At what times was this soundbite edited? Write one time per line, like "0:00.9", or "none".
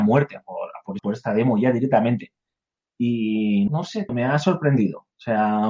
0:01.0
0:03.7
0:04.1